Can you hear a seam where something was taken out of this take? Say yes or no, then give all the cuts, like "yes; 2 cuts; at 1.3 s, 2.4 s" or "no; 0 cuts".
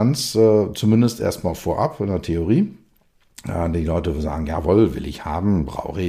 no; 0 cuts